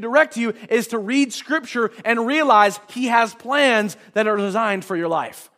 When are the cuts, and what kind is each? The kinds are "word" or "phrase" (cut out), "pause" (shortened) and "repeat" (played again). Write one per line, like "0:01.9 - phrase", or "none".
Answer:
none